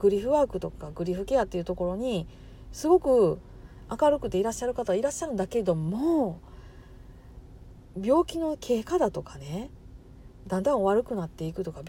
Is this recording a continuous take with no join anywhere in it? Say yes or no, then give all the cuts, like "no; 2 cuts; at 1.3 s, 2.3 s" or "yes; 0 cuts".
yes; 0 cuts